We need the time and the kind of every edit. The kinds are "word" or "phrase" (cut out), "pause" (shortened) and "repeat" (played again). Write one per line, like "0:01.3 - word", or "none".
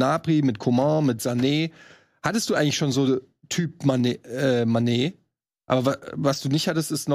none